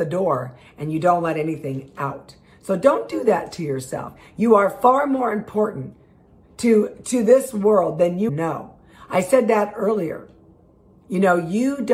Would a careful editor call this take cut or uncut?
cut